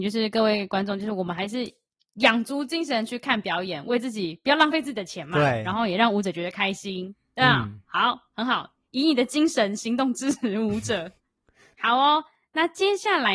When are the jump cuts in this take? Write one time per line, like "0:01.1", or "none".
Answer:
none

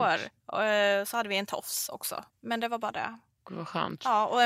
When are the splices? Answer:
0:02.3

